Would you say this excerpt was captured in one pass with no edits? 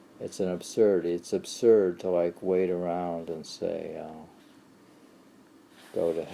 yes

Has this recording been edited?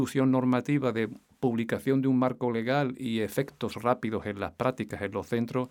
no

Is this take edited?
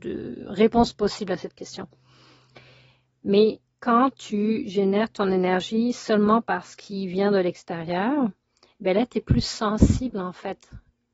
no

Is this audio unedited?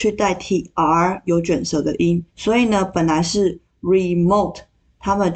no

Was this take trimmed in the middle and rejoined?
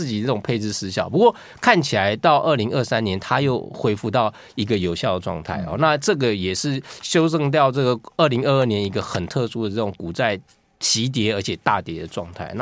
no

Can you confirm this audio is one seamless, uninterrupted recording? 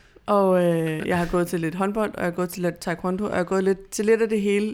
yes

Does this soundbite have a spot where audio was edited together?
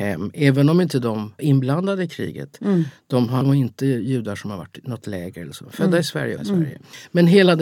yes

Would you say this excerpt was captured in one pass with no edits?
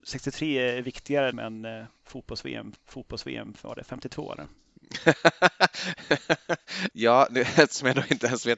no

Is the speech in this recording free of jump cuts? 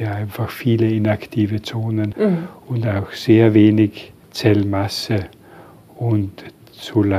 no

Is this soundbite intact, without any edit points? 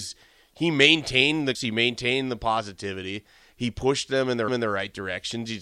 no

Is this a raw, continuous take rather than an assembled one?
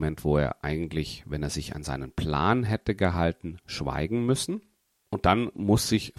no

